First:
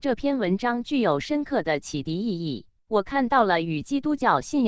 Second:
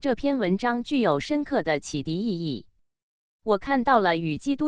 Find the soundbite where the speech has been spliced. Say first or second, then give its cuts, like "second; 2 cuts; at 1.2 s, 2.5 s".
first; 1 cut; at 2.8 s